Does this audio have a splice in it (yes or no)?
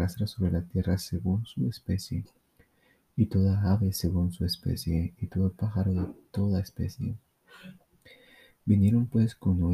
no